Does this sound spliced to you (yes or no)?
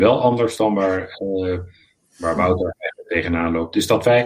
no